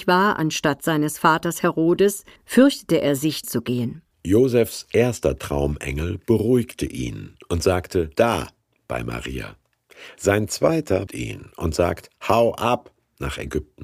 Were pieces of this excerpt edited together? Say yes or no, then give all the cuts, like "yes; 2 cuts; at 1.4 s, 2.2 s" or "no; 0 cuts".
yes; 5 cuts; at 2.4 s, 3.4 s, 4.1 s, 8.1 s, 11.1 s